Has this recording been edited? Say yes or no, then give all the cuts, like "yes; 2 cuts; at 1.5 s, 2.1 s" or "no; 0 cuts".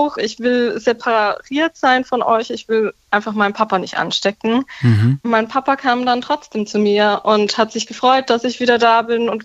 no; 0 cuts